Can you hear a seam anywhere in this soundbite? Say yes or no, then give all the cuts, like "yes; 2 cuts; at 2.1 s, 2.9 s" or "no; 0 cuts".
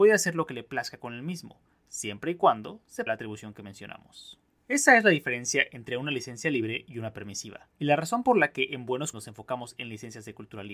yes; 3 cuts; at 3.1 s, 7.7 s, 9.1 s